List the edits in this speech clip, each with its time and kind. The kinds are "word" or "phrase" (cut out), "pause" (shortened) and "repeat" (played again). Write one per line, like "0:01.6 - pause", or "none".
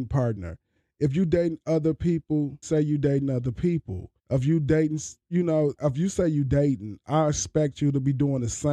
0:02.6 - word
0:04.2 - pause
0:05.2 - pause
0:05.8 - word